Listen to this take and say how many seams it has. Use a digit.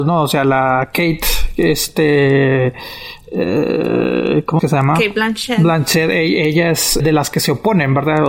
2